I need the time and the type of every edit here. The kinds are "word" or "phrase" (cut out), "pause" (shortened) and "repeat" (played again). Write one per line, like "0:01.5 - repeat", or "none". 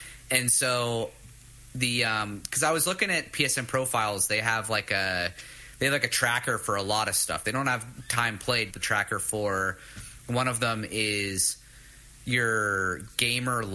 0:08.8 - phrase